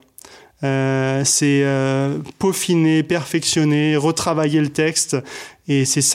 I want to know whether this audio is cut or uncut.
uncut